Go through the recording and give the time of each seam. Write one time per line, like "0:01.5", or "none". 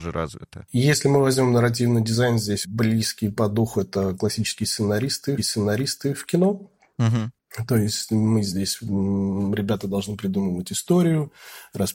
0:02.6
0:05.4